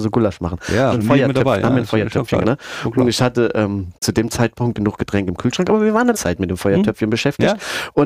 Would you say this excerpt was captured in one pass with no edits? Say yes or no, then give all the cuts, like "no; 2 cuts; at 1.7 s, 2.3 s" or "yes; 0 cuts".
no; 5 cuts; at 0.9 s, 2.4 s, 3.9 s, 4.7 s, 6.1 s